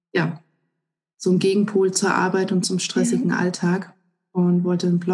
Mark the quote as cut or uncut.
uncut